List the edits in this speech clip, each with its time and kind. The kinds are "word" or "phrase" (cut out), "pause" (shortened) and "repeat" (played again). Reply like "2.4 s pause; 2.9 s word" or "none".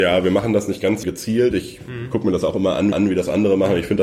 1.0 s word; 2.9 s repeat